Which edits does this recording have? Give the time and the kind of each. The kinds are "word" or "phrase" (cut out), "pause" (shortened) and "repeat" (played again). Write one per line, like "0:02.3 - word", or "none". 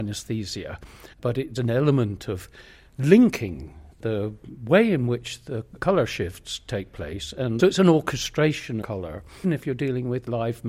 0:01.1 - pause
0:01.6 - word
0:03.9 - pause
0:05.8 - word
0:07.6 - phrase
0:08.8 - word
0:09.4 - word

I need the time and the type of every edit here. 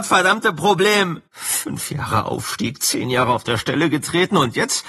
0:01.3 - pause

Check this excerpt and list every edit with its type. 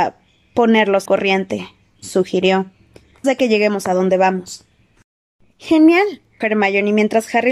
0:01.1 - word
0:03.2 - word
0:06.4 - word

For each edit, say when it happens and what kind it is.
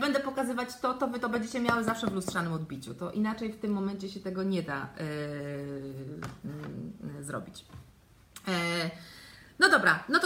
none

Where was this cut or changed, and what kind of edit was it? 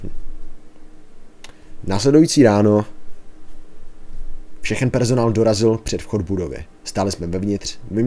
0:06.8 - pause

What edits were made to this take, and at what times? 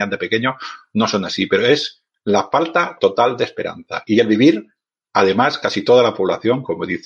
none

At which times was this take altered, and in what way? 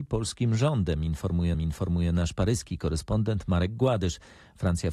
0:01.5 - repeat

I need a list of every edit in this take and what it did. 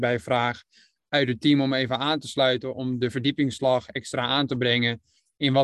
none

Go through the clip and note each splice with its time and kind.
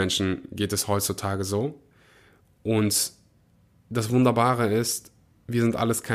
none

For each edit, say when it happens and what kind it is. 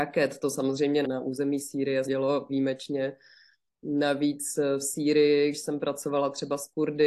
0:01.0 - word
0:02.1 - word
0:02.5 - word
0:05.5 - word

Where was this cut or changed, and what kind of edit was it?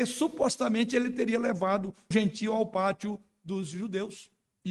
0:02.1 - word

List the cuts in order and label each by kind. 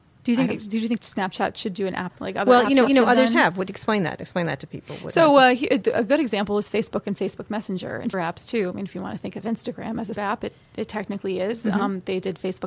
0:01.0 - word
0:02.1 - word
0:02.9 - repeat
0:08.1 - phrase
0:10.2 - word

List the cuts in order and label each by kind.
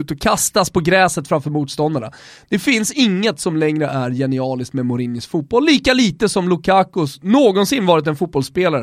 none

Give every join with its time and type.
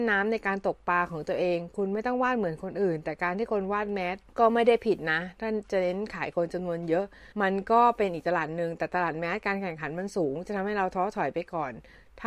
0:04.3 - pause
0:07.3 - pause

